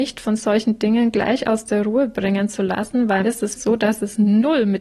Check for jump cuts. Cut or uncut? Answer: cut